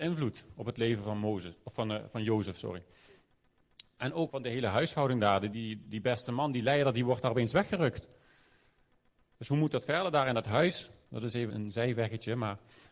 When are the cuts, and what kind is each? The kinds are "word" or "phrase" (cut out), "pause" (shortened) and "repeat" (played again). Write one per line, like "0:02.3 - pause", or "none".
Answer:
0:04.3 - word
0:05.5 - word
0:11.5 - word